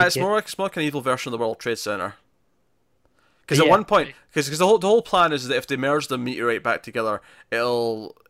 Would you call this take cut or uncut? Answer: uncut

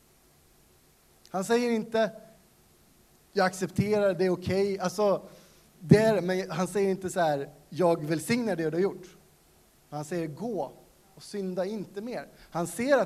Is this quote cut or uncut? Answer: uncut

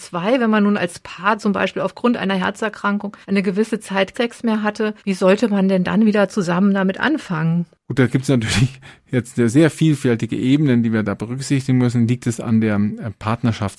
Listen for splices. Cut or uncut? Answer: cut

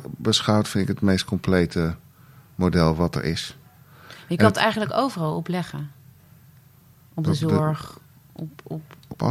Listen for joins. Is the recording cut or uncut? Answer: uncut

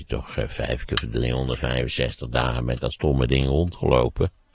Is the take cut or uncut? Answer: uncut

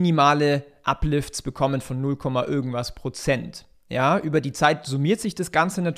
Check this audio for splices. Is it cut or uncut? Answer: uncut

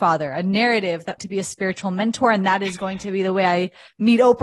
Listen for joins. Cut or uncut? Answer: cut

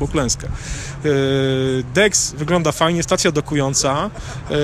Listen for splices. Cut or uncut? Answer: uncut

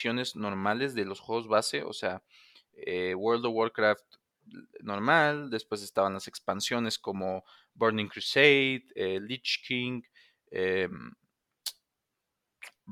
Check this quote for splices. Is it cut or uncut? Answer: uncut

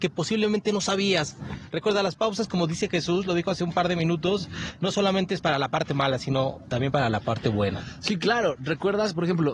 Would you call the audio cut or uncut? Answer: uncut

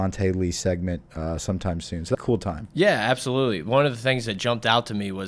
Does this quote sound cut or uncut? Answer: cut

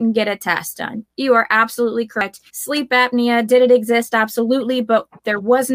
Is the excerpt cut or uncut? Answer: cut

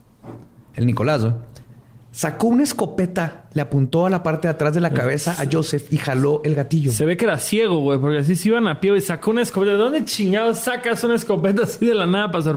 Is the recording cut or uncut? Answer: uncut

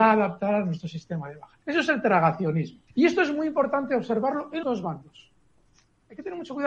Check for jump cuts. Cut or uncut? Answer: cut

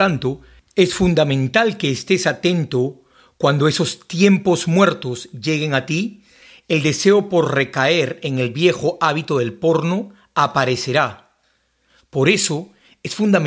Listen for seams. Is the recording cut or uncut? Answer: uncut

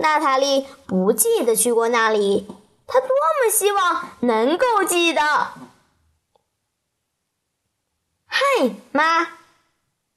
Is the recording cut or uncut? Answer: uncut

